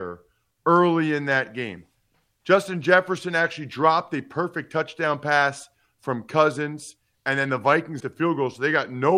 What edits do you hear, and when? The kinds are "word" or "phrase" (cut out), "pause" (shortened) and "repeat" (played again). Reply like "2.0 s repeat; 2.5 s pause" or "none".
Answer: 8.0 s word